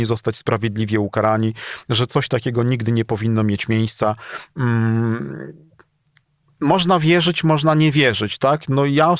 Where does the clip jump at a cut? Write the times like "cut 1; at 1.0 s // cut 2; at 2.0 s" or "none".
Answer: none